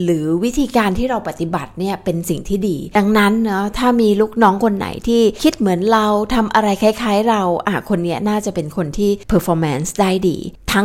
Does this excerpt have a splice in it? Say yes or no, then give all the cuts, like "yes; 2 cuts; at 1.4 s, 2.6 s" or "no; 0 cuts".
no; 0 cuts